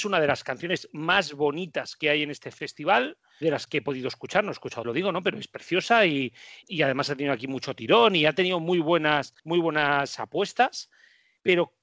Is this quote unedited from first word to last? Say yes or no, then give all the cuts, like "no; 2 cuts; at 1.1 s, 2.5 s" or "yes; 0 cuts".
no; 4 cuts; at 3.4 s, 4.8 s, 6.6 s, 9.4 s